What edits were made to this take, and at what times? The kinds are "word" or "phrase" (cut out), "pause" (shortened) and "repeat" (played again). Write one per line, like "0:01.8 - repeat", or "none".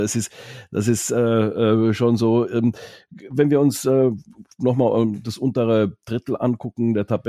0:04.5 - pause

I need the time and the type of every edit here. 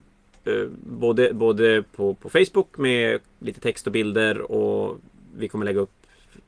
none

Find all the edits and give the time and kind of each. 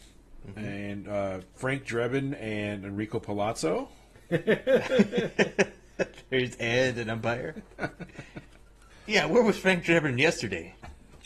0:08.9 - pause

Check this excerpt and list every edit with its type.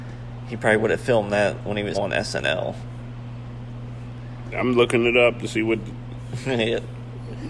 0:01.9 - word

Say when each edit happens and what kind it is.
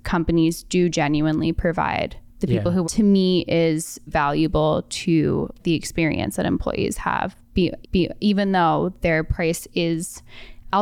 0:02.8 - phrase
0:04.1 - word
0:05.6 - word
0:07.8 - repeat

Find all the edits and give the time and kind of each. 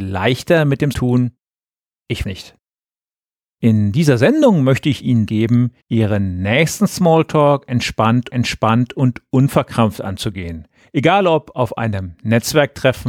0:00.9 - word
0:02.2 - phrase
0:05.3 - phrase
0:05.8 - pause
0:08.3 - repeat
0:10.8 - pause

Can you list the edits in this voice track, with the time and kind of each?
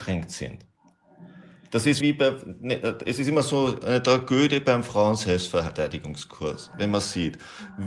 0:02.0 - word

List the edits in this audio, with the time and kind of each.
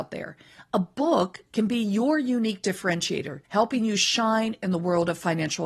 0:03.4 - pause

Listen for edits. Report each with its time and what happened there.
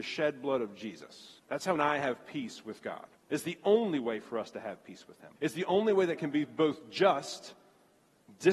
0:01.4 - pause
0:01.8 - word
0:03.2 - pause
0:05.4 - pause
0:06.2 - word

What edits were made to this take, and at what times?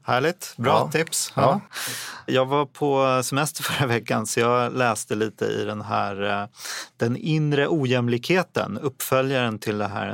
none

